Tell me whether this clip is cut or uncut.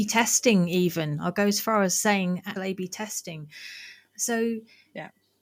cut